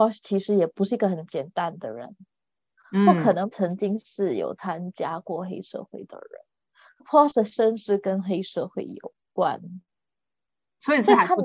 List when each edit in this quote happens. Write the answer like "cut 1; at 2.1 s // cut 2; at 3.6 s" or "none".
cut 1; at 3.5 s // cut 2; at 7.0 s